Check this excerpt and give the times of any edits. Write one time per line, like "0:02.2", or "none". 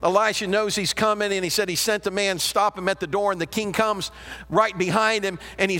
none